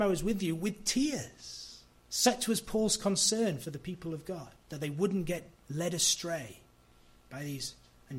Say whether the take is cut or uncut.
cut